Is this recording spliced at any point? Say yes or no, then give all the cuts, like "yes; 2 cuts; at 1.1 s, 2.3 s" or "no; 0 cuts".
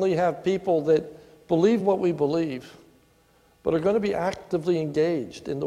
no; 0 cuts